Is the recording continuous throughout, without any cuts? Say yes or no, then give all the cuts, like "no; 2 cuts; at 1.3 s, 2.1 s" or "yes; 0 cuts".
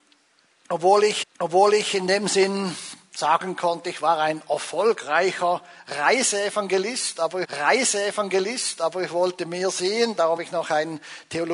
no; 3 cuts; at 1.2 s, 7.4 s, 10.4 s